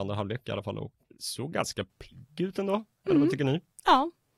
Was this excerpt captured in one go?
no; 1 cut; at 1.1 s

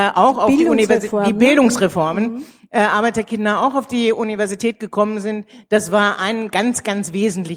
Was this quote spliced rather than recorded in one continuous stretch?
no; 0 cuts

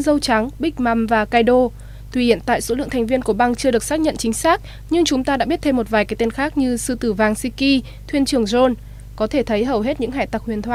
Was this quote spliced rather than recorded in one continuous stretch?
no; 0 cuts

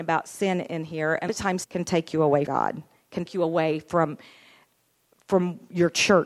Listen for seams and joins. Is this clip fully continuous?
no; 4 cuts; at 1.3 s, 1.6 s, 2.5 s, 3.3 s

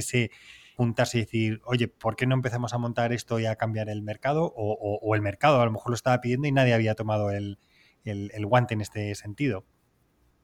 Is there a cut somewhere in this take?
no; 0 cuts

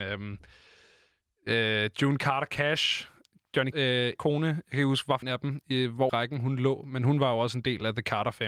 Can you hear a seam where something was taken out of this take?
yes; 4 cuts; at 3.7 s, 4.1 s, 5.2 s, 6.1 s

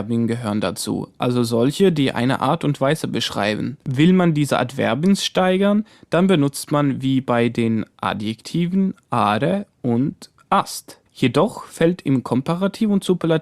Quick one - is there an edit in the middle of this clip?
yes; 3 cuts; at 3.8 s, 7.9 s, 11.1 s

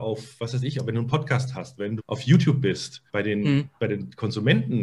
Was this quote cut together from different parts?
yes; 2 cuts; at 2.0 s, 3.1 s

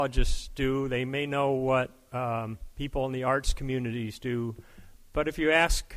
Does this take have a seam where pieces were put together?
no; 0 cuts

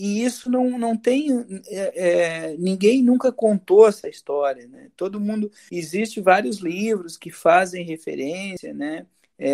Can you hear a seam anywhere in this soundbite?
no; 0 cuts

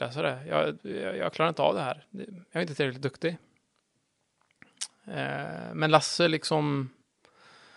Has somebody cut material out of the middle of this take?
no; 0 cuts

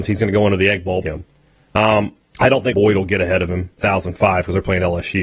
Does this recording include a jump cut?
yes; 4 cuts; at 1.0 s, 2.2 s, 2.7 s, 3.8 s

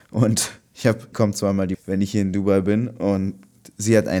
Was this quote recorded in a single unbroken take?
no; 2 cuts; at 1.1 s, 1.7 s

